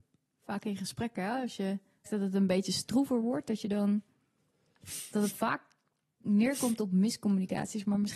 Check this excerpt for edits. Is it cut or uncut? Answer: cut